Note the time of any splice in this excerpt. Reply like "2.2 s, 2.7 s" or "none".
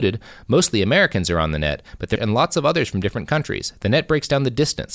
2.2 s